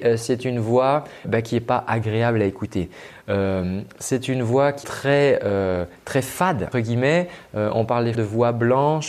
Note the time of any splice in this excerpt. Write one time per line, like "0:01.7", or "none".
0:01.2
0:04.8
0:06.7
0:08.1